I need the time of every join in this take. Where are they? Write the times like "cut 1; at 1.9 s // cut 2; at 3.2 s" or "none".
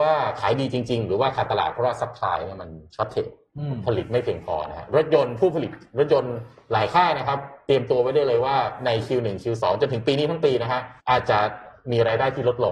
cut 1; at 11.0 s